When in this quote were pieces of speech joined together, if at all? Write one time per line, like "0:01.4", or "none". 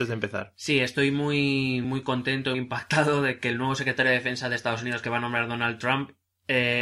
0:01.8
0:02.5